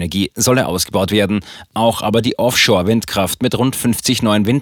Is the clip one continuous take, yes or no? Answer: yes